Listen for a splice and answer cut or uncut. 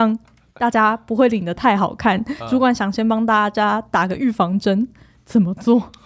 uncut